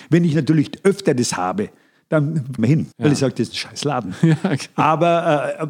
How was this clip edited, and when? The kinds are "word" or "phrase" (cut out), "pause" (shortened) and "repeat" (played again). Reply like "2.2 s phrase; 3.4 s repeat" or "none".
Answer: 2.6 s phrase; 2.9 s pause